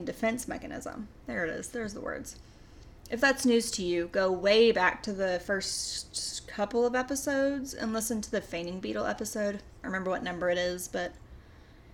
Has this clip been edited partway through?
yes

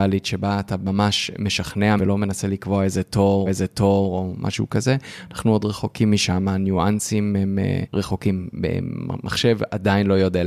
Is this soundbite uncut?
no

